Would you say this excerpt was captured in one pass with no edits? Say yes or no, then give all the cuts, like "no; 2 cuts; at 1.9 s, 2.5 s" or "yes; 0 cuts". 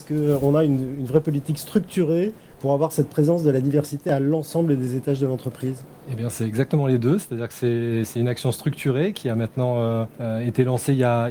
no; 2 cuts; at 2.4 s, 10.1 s